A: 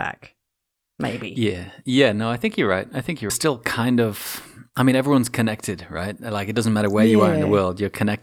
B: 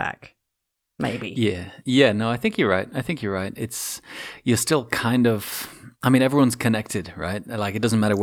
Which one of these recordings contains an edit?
A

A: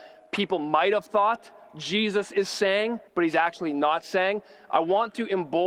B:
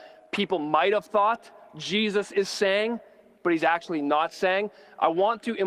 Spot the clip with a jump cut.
A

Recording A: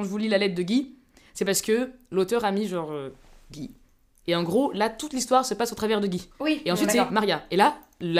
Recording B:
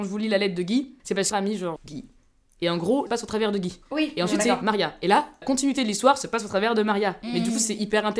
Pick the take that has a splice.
B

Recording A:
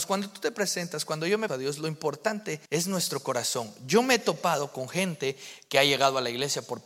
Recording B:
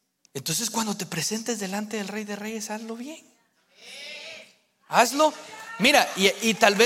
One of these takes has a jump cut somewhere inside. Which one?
A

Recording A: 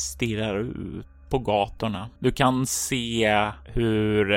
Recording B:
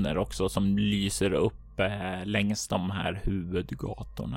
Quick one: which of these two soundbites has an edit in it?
A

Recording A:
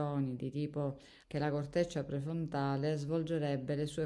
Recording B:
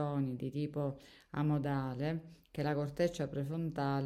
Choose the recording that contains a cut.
A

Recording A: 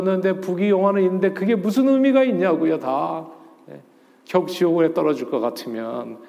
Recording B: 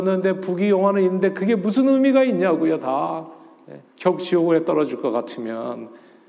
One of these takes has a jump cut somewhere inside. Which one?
B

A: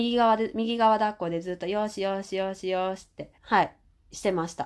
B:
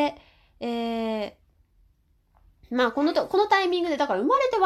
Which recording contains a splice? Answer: A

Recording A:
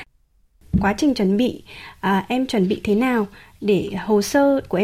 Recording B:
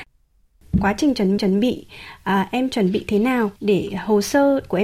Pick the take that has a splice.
B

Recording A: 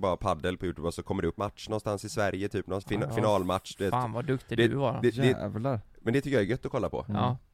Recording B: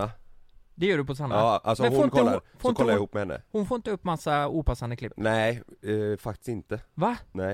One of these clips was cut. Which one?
A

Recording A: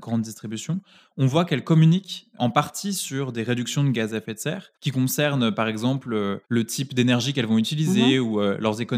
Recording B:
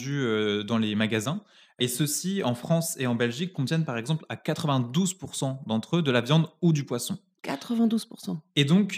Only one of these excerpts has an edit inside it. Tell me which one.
A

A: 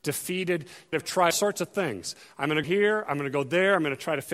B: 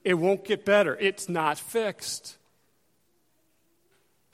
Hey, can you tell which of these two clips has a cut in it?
A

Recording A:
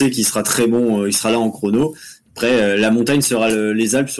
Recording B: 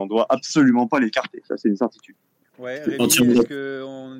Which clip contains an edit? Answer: B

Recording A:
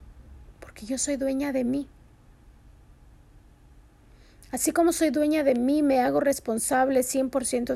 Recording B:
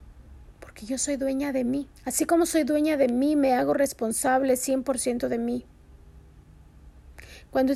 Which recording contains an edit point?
B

